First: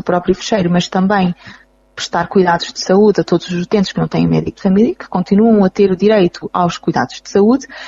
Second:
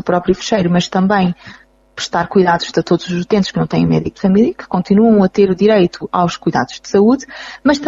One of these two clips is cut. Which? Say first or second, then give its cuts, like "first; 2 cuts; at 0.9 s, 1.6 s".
second; 1 cut; at 2.7 s